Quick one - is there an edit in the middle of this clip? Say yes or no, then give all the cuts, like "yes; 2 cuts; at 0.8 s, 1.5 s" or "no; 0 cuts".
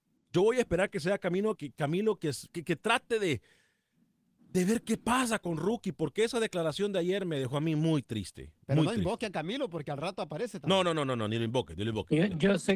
yes; 2 cuts; at 1.6 s, 2.5 s